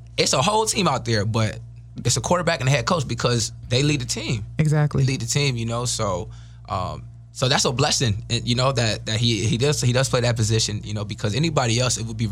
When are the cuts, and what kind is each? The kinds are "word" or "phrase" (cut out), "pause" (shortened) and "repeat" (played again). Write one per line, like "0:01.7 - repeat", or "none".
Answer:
none